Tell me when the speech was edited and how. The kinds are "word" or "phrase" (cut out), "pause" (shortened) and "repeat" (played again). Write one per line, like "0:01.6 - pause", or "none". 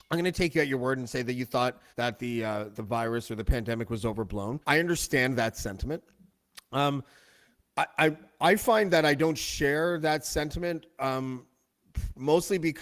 0:01.9 - pause
0:02.7 - word
0:04.6 - pause